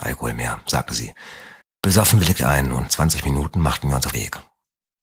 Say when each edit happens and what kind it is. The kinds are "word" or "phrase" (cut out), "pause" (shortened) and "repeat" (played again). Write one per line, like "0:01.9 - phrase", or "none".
0:01.6 - pause
0:02.4 - word
0:02.9 - word
0:04.1 - word